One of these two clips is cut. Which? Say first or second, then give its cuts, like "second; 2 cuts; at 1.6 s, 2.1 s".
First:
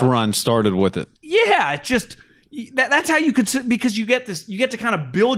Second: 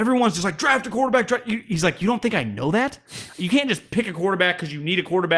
first; 1 cut; at 1.2 s